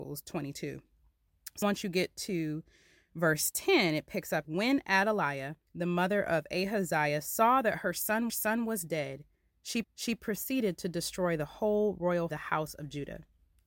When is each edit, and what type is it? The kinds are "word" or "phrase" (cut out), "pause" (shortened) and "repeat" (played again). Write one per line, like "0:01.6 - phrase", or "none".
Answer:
0:01.6 - word
0:04.4 - phrase
0:05.6 - pause
0:08.3 - repeat
0:09.8 - repeat
0:12.3 - phrase

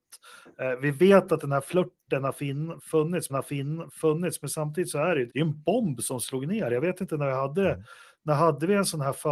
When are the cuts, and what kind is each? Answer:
0:03.3 - repeat
0:05.3 - word

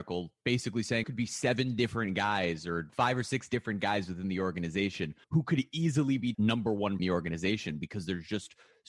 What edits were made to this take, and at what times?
0:01.0 - word
0:02.9 - phrase
0:05.2 - pause
0:06.3 - phrase
0:07.0 - phrase

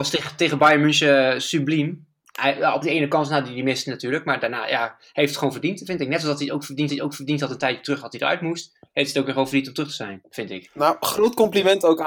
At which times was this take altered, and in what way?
0:06.9 - repeat

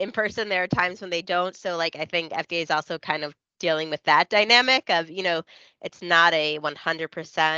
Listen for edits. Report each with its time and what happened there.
none

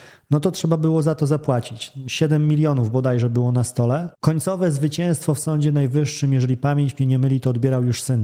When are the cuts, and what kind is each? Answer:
0:04.1 - pause

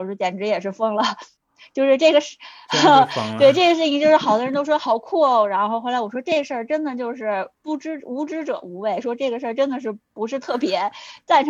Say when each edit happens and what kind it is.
0:07.6 - pause

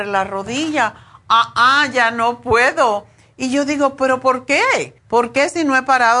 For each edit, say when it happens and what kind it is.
0:05.0 - pause

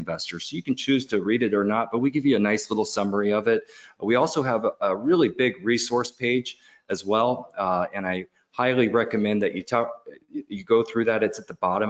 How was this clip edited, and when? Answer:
none

